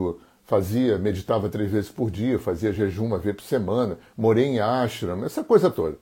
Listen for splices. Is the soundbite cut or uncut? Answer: uncut